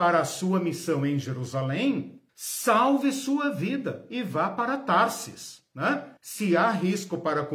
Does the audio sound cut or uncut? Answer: cut